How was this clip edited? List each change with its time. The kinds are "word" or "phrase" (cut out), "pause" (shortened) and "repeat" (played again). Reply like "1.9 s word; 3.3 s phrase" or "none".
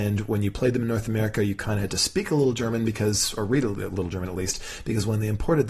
none